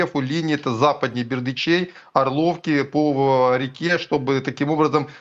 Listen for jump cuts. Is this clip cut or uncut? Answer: uncut